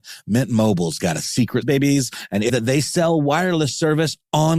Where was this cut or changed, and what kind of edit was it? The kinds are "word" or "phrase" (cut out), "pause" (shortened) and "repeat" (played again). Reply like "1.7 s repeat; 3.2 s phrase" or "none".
1.6 s word; 2.5 s word